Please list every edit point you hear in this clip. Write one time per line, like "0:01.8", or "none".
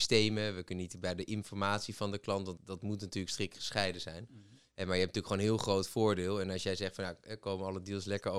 0:02.6